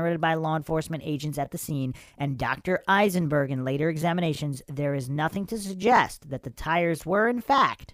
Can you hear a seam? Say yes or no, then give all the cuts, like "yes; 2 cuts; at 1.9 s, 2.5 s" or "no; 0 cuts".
no; 0 cuts